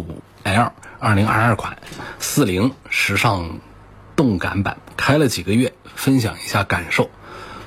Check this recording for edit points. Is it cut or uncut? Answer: uncut